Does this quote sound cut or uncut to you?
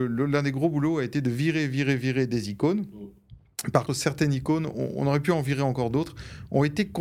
cut